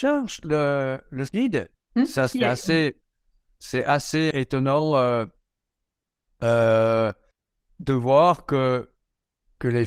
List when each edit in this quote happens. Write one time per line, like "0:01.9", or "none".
0:01.3
0:01.7
0:04.3
0:07.3